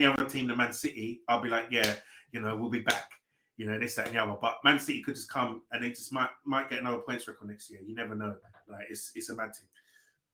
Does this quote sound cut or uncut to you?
uncut